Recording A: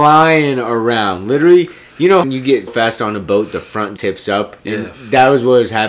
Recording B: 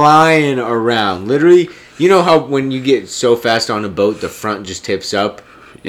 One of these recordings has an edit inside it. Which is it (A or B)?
A